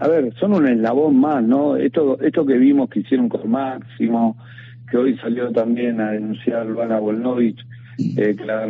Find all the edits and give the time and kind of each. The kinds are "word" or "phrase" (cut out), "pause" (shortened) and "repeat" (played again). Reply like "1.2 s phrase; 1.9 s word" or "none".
none